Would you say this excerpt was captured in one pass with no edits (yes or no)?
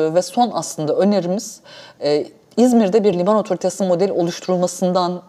yes